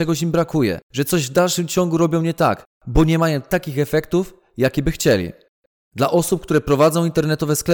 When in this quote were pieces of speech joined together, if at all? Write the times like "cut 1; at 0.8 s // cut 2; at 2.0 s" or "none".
none